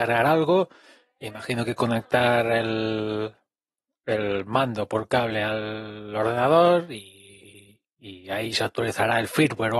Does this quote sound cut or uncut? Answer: uncut